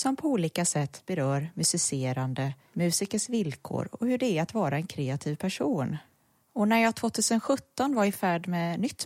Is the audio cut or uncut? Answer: uncut